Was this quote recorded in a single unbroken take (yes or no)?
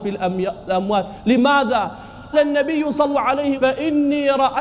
no